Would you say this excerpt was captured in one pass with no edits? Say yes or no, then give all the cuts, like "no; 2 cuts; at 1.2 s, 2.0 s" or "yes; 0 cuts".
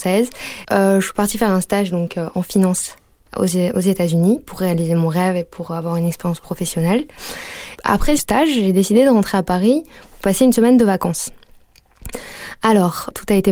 no; 1 cut; at 8.2 s